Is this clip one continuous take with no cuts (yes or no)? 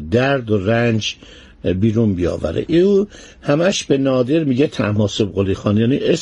yes